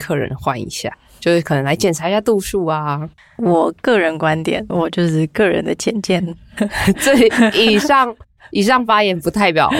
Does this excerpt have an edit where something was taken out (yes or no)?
yes